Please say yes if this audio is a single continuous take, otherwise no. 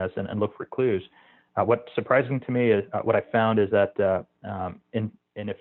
yes